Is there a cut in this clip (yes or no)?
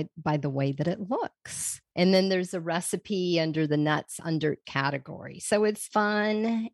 yes